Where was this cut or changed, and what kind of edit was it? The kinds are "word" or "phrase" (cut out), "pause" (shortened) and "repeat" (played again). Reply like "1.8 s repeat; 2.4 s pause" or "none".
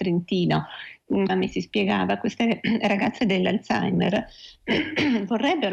1.3 s phrase